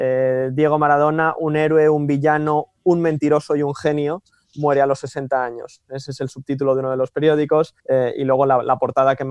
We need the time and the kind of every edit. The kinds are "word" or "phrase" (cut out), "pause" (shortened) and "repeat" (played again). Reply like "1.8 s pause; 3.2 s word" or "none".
7.8 s pause